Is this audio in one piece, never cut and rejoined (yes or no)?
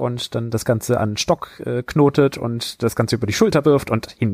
yes